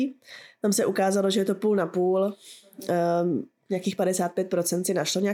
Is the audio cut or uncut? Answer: uncut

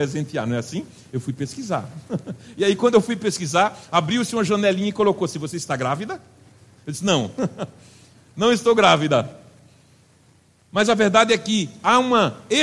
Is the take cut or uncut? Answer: uncut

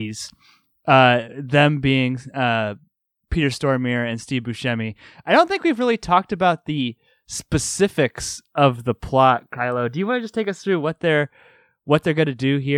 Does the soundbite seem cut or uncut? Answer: uncut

